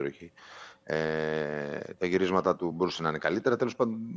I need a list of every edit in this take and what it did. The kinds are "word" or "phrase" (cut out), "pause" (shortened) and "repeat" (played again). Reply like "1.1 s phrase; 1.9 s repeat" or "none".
none